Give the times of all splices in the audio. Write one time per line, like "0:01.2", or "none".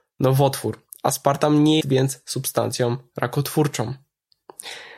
0:01.8